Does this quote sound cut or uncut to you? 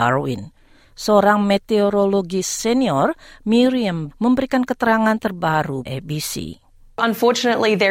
cut